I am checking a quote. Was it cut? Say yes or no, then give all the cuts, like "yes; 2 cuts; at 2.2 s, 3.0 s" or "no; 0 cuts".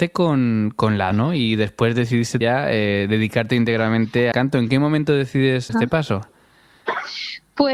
yes; 4 cuts; at 1.1 s, 2.4 s, 4.3 s, 5.7 s